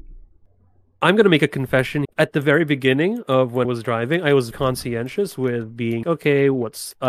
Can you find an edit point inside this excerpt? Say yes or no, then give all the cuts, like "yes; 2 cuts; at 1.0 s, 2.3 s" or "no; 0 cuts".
yes; 4 cuts; at 2.0 s, 3.6 s, 4.5 s, 6.0 s